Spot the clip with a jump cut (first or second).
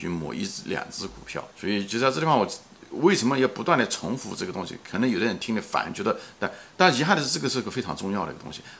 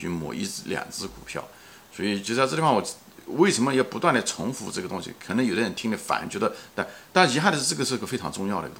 first